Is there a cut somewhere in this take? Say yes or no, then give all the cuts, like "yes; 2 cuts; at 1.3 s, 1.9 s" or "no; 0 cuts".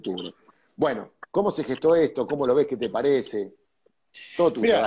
no; 0 cuts